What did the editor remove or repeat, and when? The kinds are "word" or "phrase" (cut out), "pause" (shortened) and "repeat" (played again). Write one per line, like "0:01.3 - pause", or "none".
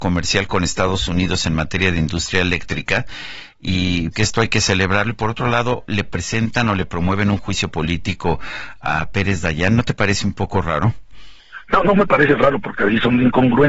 0:04.1 - word